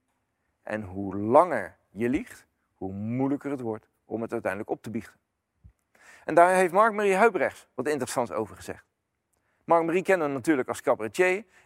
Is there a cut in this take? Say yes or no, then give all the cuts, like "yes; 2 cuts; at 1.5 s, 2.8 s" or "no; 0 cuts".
no; 0 cuts